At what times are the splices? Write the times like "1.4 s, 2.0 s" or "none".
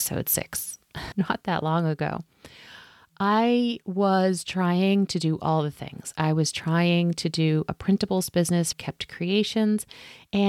1.1 s, 8.7 s